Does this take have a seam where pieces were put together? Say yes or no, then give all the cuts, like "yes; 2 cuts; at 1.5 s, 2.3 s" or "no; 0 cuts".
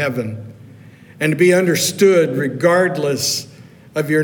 no; 0 cuts